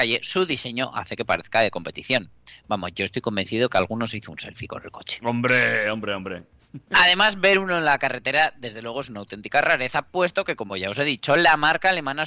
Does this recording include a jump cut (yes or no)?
no